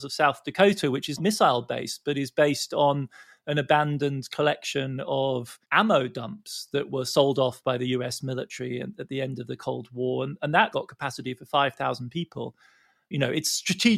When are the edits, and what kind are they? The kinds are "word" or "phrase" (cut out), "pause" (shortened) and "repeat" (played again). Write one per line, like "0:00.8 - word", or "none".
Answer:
0:01.2 - word
0:05.6 - pause
0:10.7 - word